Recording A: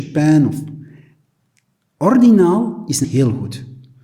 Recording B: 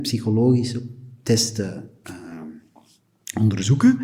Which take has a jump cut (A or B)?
A